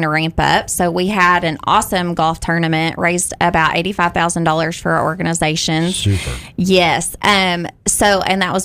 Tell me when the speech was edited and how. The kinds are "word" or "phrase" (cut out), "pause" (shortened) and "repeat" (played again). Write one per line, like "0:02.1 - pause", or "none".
none